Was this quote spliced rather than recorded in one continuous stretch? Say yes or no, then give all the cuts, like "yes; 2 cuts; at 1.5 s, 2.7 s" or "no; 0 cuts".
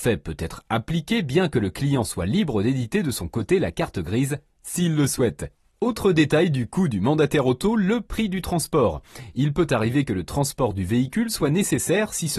no; 0 cuts